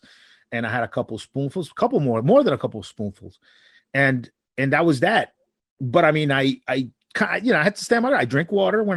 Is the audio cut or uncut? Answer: uncut